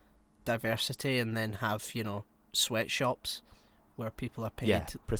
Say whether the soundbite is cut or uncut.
uncut